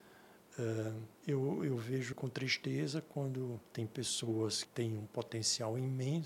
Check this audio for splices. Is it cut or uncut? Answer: cut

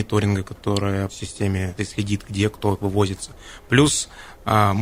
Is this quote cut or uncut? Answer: cut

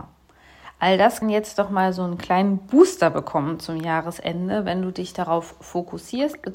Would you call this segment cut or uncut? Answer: cut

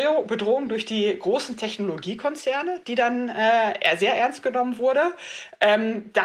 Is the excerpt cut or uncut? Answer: uncut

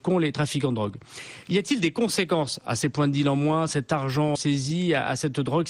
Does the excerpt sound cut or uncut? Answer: cut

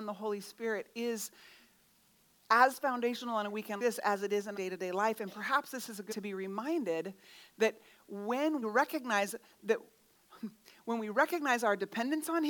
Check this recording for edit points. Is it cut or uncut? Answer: cut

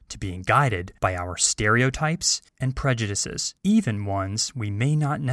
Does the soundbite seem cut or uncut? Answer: cut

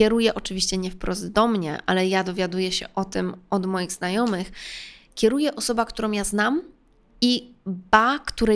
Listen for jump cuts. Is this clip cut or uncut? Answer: uncut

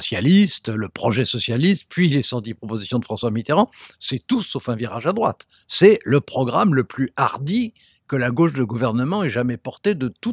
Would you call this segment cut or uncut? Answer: uncut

